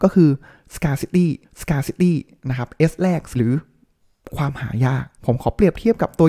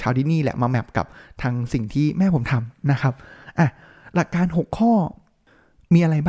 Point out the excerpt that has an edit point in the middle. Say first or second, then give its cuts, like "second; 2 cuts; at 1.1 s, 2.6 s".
first; 3 cuts; at 1.4 s, 3.3 s, 5.2 s